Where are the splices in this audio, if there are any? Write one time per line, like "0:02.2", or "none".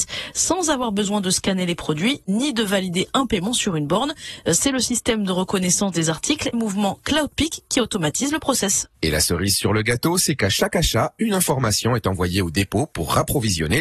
0:06.5